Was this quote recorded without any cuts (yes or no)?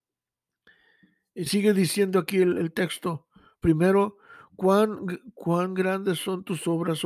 no